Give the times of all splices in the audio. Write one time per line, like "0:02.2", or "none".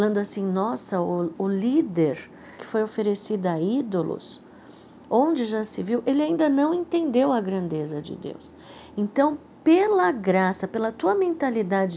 0:02.6